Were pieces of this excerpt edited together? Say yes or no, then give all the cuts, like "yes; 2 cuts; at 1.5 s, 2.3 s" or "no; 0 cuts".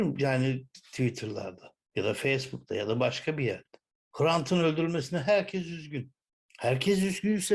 no; 0 cuts